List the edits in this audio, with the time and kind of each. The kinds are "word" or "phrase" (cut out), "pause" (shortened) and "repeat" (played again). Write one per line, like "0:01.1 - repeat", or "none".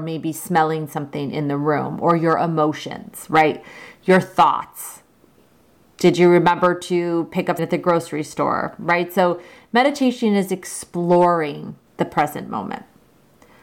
0:07.6 - word
0:11.9 - pause